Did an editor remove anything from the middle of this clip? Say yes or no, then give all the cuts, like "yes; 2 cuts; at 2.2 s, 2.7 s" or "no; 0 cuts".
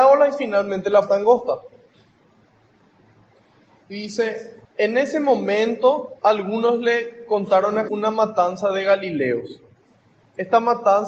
yes; 4 cuts; at 1.1 s, 4.6 s, 6.2 s, 7.9 s